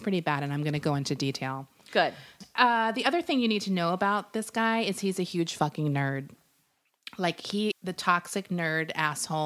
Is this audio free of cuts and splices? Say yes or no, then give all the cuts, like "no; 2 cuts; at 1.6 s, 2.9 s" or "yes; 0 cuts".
no; 1 cut; at 7.7 s